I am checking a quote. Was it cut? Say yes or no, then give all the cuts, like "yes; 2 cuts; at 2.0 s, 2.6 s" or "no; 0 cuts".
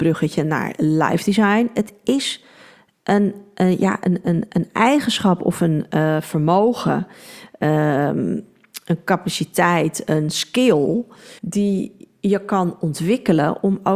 yes; 1 cut; at 11.4 s